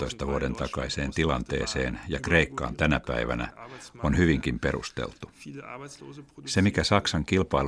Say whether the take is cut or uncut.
uncut